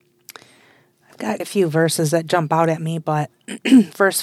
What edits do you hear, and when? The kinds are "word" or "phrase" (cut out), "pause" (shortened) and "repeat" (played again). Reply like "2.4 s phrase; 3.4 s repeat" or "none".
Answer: 1.4 s word